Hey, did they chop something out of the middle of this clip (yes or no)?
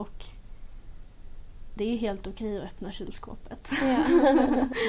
yes